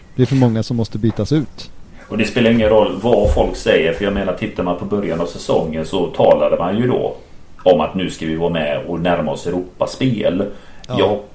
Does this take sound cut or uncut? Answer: uncut